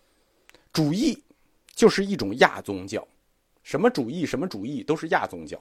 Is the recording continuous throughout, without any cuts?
yes; 0 cuts

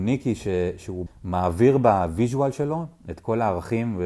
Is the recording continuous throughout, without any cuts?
no; 1 cut; at 1.1 s

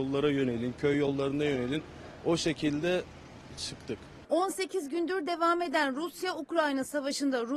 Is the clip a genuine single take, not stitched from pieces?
yes; 0 cuts

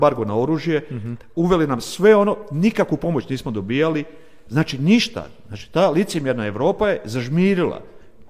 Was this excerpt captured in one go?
yes; 0 cuts

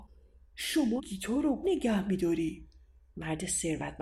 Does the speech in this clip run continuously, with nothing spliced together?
no; 2 cuts; at 1.0 s, 1.6 s

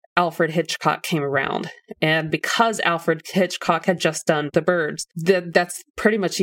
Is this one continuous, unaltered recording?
yes; 0 cuts

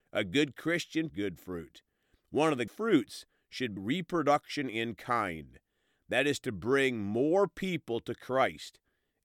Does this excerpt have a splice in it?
yes; 3 cuts; at 1.1 s, 2.7 s, 3.8 s

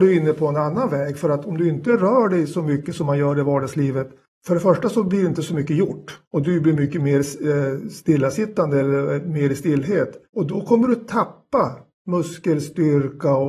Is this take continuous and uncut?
no; 4 cuts; at 4.3 s, 6.2 s, 10.2 s, 11.9 s

